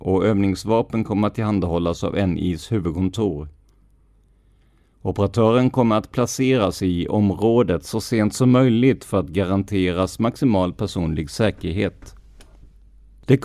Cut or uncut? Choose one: uncut